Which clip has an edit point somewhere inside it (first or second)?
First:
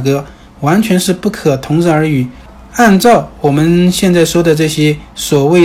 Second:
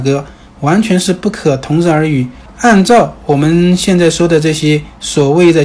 second